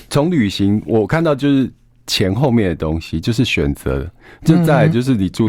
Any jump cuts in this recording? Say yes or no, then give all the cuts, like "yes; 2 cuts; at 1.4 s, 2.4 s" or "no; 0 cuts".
no; 0 cuts